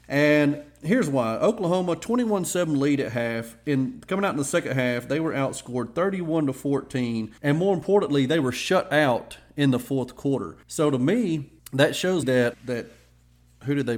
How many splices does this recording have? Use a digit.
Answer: 5